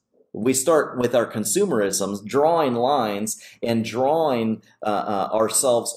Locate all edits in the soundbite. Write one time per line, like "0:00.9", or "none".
none